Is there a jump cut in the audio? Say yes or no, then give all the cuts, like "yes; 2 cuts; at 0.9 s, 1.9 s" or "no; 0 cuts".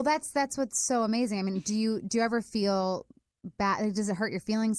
no; 0 cuts